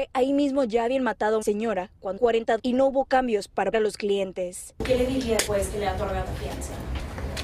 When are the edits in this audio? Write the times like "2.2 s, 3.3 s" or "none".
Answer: 1.4 s, 2.2 s, 2.6 s, 3.7 s, 5.5 s, 6.3 s